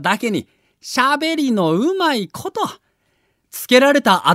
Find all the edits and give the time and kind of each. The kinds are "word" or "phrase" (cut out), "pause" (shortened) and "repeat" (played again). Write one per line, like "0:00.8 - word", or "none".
none